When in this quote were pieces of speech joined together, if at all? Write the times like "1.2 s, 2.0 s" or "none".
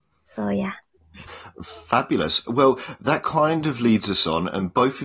none